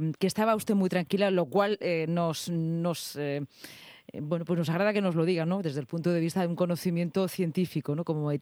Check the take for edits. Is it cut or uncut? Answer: uncut